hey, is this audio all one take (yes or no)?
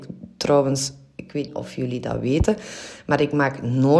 no